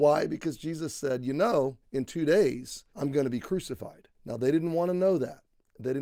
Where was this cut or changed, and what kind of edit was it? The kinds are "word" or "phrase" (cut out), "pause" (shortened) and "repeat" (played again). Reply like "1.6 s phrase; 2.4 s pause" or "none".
1.8 s pause; 2.9 s pause; 4.1 s pause